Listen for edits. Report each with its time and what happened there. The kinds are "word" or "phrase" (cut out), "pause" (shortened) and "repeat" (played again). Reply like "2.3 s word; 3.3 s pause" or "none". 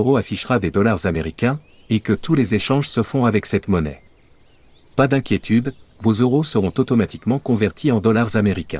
none